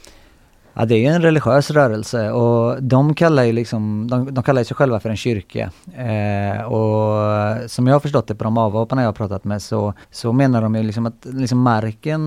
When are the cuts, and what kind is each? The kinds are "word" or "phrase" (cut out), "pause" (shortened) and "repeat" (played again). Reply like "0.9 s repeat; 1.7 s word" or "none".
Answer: 10.0 s pause